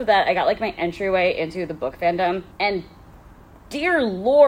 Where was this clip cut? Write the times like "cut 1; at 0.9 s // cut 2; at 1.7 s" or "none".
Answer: cut 1; at 2.5 s